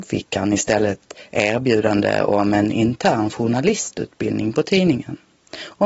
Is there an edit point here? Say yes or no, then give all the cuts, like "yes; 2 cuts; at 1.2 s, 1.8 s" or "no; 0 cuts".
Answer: no; 0 cuts